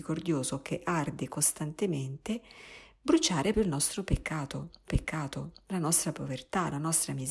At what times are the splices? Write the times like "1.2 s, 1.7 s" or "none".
3.5 s, 4.9 s